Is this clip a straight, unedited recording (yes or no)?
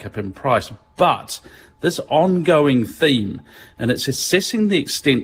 yes